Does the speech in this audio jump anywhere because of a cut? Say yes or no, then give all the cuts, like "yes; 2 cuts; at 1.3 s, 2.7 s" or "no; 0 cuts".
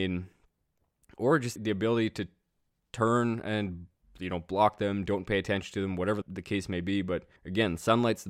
yes; 3 cuts; at 1.6 s, 6.2 s, 7.4 s